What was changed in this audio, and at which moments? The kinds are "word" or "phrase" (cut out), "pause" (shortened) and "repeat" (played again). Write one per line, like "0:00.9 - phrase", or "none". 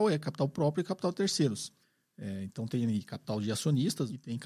0:01.8 - pause